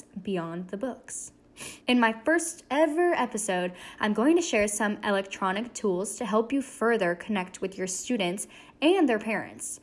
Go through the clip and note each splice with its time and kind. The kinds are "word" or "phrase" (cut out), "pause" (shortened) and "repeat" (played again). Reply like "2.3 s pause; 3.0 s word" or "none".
1.8 s pause